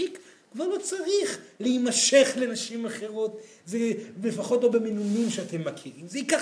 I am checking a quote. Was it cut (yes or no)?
no